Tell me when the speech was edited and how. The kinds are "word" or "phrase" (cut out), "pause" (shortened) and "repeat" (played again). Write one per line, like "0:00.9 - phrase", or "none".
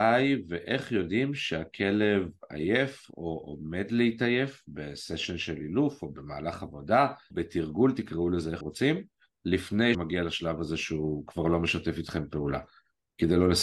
0:07.3 - word
0:08.6 - word
0:09.9 - word